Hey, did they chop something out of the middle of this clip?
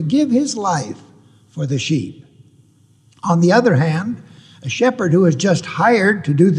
no; 0 cuts

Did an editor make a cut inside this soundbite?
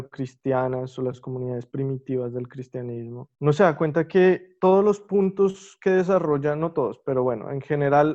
yes; 1 cut; at 3.4 s

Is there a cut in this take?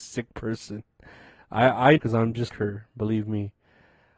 yes; 2 cuts; at 2.0 s, 2.5 s

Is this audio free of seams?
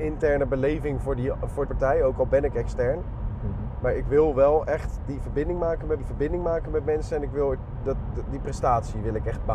no; 2 cuts; at 1.7 s, 6.0 s

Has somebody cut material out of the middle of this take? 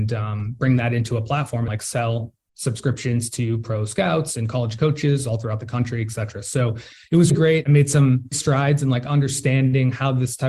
yes; 3 cuts; at 1.7 s, 7.3 s, 8.3 s

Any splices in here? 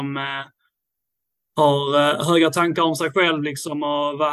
no; 0 cuts

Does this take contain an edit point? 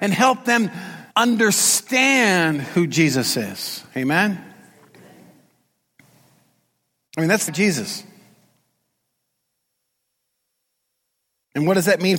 yes; 2 cuts; at 1.1 s, 7.5 s

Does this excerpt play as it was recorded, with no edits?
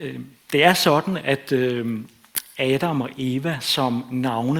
yes; 0 cuts

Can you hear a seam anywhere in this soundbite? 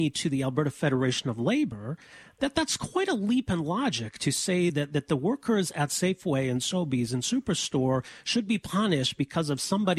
no; 0 cuts

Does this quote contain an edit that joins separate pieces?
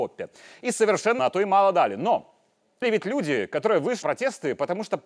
yes; 3 cuts; at 1.2 s, 2.8 s, 4.0 s

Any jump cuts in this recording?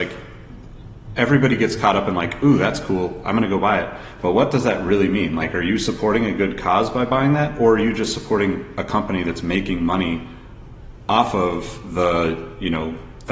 no; 0 cuts

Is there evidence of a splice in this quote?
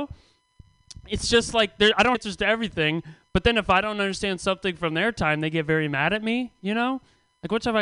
yes; 1 cut; at 2.1 s

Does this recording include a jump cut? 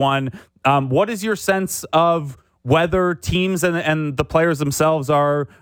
no; 0 cuts

